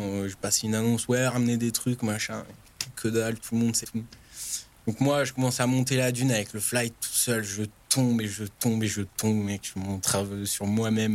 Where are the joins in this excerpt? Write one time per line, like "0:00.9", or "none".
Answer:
0:03.8

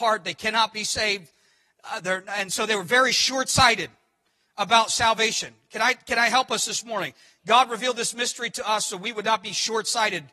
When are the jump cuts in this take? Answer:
none

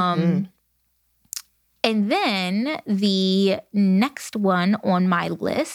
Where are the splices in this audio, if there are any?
none

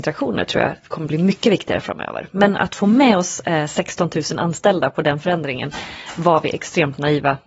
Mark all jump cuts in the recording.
none

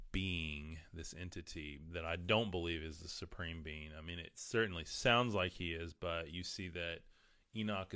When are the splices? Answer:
none

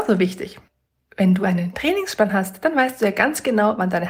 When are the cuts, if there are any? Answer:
none

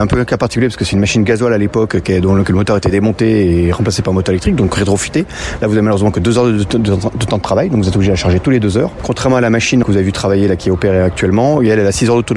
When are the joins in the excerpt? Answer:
0:09.8

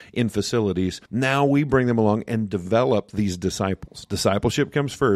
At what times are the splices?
0:01.1

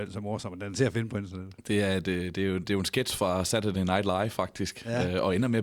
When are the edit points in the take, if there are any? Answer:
none

